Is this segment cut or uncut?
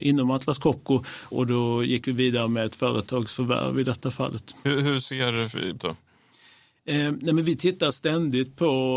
cut